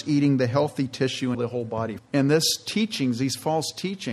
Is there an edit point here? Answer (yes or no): yes